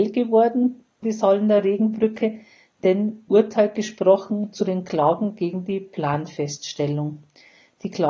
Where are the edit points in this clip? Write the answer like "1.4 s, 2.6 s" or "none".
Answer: 1.0 s, 3.3 s